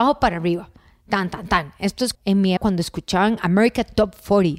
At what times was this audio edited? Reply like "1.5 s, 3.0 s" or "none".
2.1 s, 2.6 s

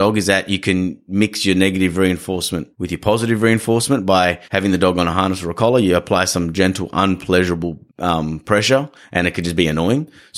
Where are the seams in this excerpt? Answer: 2.7 s, 4.4 s, 7.9 s

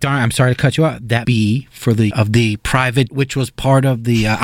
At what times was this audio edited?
1.2 s, 2.1 s, 3.1 s

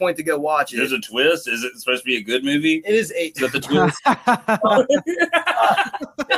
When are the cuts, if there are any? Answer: none

